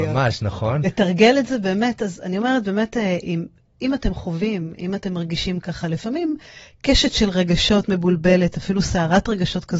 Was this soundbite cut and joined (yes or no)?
no